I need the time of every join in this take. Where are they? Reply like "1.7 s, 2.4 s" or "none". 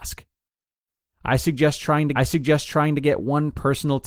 2.2 s